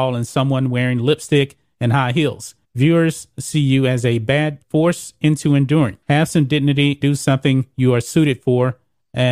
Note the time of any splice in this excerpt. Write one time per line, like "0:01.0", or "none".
0:02.6
0:04.6
0:06.0
0:07.0

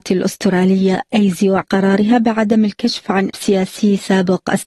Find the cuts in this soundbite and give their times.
0:01.6
0:03.3

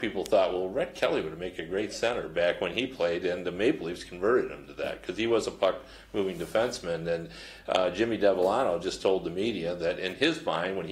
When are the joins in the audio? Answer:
none

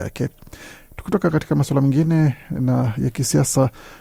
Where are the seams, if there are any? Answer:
none

